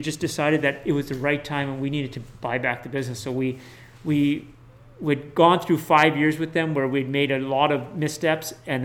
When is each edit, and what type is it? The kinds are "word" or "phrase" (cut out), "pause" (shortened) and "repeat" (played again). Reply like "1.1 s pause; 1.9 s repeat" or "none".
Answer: none